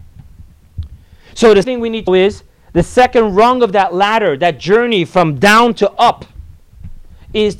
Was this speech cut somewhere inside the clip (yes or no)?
yes